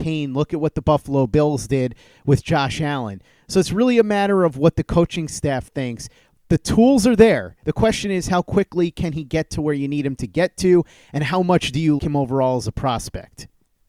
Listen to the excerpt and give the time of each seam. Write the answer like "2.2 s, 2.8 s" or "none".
12.0 s